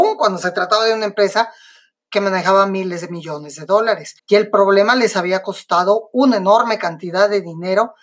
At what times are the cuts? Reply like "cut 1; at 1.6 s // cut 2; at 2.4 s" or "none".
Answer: cut 1; at 4.2 s